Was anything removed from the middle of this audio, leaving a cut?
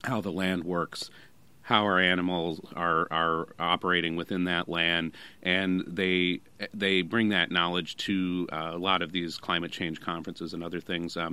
no; 0 cuts

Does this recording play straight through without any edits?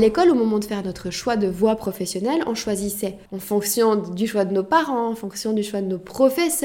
no; 1 cut; at 3.3 s

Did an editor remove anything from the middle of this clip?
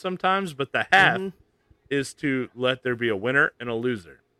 no; 0 cuts

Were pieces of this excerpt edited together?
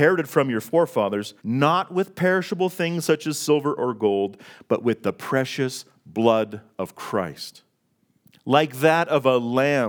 yes; 1 cut; at 1.4 s

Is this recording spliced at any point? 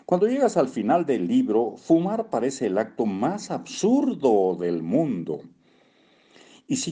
no; 0 cuts

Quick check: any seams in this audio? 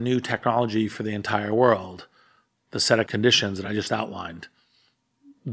no; 0 cuts

